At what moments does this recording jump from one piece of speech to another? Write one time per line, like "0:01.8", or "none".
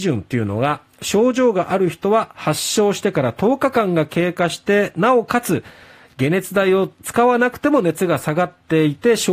none